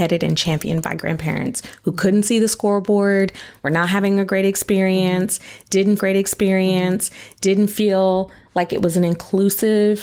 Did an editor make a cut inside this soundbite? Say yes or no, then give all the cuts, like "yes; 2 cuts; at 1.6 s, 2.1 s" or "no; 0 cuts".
yes; 1 cut; at 6.0 s